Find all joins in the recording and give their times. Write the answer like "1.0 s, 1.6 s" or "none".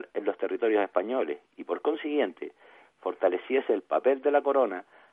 none